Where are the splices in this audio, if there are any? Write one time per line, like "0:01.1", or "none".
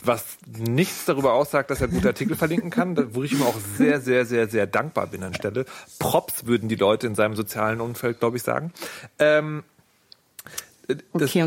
0:03.8
0:05.3